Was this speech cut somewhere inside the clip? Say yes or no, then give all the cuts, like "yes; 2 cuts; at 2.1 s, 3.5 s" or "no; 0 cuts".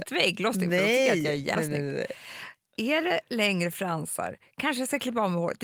yes; 1 cut; at 1.5 s